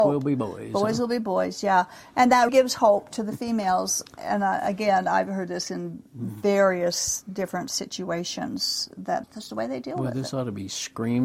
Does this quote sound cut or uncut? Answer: cut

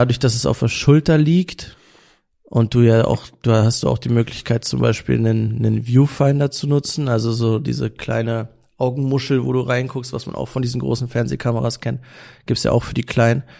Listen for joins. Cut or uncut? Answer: uncut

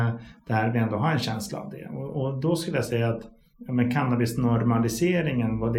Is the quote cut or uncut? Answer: uncut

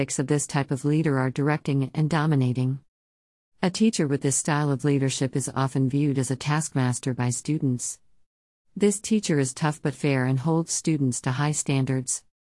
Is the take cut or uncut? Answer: uncut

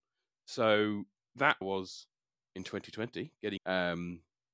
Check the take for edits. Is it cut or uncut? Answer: cut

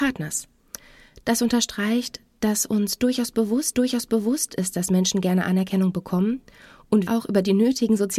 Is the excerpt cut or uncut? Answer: cut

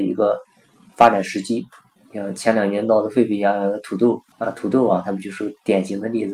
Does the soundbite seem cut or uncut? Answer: cut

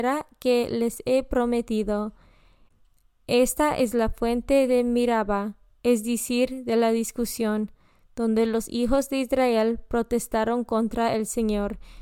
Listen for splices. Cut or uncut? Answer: uncut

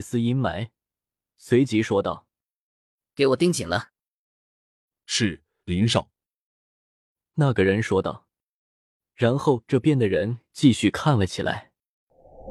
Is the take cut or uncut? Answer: uncut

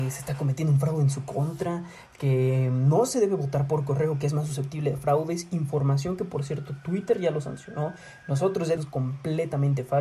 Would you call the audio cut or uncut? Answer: cut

